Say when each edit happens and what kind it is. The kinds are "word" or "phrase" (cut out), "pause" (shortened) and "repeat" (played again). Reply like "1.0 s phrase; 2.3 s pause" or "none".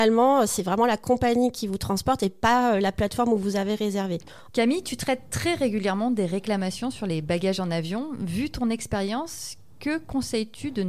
none